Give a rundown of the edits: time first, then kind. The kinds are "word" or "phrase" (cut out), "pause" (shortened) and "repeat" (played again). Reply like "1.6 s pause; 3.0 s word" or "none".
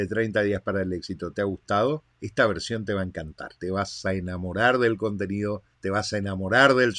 2.1 s pause; 3.6 s pause; 5.7 s pause